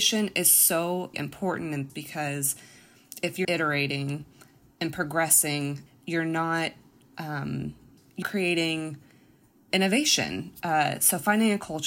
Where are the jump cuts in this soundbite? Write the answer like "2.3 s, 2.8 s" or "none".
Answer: 1.1 s, 1.9 s, 3.4 s, 5.9 s, 8.2 s